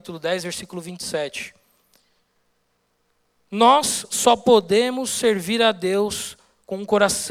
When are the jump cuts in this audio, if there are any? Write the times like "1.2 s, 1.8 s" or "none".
none

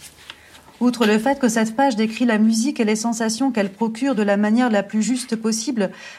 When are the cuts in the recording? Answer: none

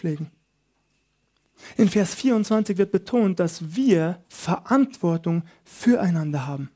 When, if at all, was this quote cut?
4.2 s

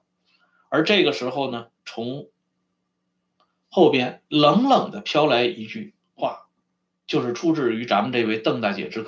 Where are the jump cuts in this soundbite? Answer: none

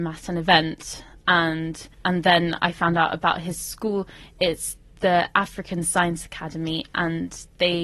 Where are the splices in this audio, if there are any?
1.9 s

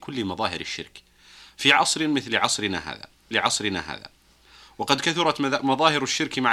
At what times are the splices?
3.3 s

